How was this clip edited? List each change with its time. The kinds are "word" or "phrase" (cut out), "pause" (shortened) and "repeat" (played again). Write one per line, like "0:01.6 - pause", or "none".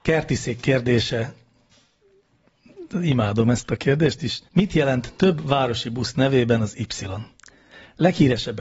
0:04.5 - pause

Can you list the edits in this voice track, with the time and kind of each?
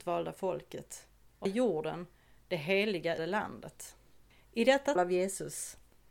0:01.5 - word
0:03.2 - word
0:05.0 - word

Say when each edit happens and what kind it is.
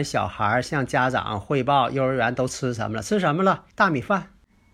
0:03.7 - pause

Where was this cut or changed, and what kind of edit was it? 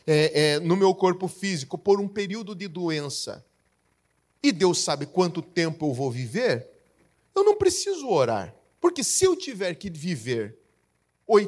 none

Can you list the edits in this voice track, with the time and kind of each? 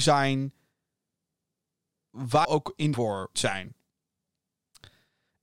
0:02.4 - word
0:02.9 - word
0:03.3 - word

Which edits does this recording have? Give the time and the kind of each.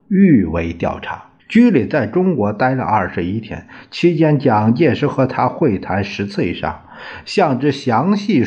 0:01.4 - pause

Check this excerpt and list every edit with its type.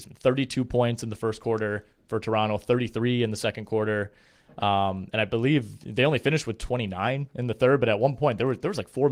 none

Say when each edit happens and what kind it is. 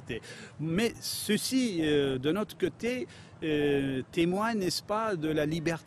none

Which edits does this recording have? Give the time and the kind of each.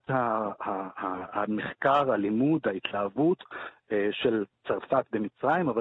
none

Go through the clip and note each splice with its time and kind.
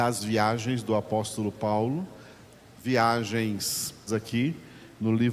0:04.1 - word

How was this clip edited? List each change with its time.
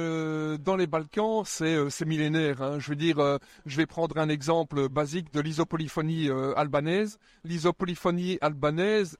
none

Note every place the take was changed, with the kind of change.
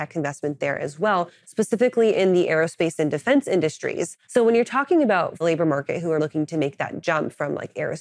0:04.2 - pause
0:05.4 - phrase
0:06.2 - word

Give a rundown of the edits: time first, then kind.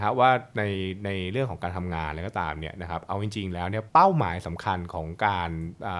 0:03.9 - pause

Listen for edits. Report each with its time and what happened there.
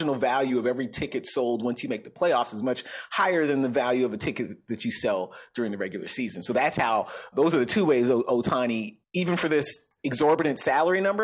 0:07.3 - word
0:09.0 - pause

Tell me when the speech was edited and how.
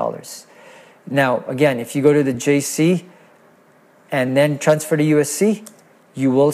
none

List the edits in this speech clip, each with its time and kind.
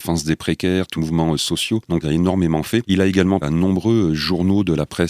0:01.0 - word
0:02.0 - phrase
0:03.4 - word

